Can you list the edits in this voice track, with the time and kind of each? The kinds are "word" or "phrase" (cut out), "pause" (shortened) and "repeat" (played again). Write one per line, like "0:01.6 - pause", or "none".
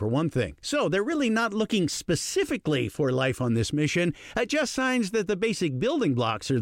none